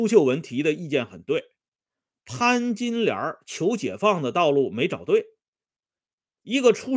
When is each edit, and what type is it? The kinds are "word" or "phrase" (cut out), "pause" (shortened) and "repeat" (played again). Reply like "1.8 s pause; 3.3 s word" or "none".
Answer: none